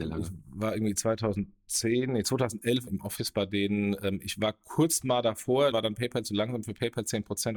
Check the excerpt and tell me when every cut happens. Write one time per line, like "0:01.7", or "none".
0:02.9
0:05.7

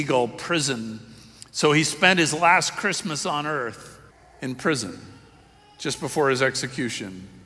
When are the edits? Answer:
0:04.1

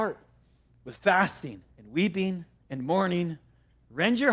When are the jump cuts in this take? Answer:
0:01.7
0:02.6

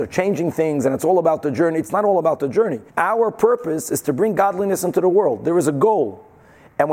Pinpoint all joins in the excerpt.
0:02.9

